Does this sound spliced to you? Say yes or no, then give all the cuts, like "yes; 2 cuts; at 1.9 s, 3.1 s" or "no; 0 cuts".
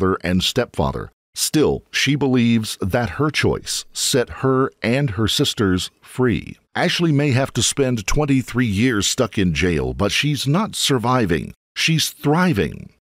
yes; 2 cuts; at 6.6 s, 10.7 s